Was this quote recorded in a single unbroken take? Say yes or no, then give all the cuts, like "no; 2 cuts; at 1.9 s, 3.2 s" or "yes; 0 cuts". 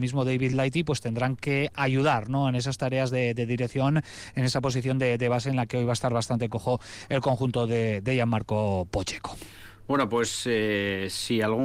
yes; 0 cuts